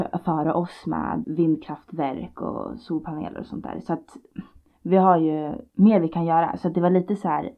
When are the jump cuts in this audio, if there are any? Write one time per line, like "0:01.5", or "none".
0:01.2